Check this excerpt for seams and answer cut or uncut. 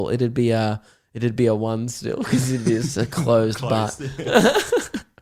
uncut